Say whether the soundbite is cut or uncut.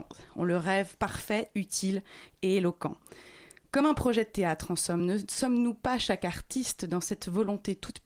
uncut